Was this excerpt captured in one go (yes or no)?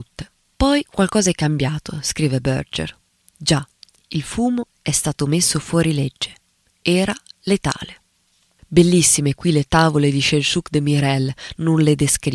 yes